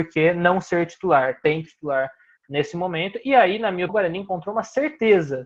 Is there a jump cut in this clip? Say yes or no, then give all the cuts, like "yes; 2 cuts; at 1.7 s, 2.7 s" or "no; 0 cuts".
yes; 2 cuts; at 1.7 s, 3.9 s